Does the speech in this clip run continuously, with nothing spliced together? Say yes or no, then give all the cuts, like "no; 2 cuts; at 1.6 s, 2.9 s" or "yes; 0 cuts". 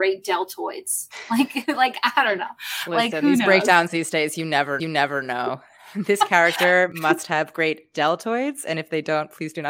no; 1 cut; at 4.8 s